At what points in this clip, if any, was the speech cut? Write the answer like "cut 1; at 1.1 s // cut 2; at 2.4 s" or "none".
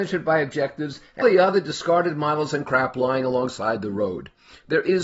cut 1; at 1.2 s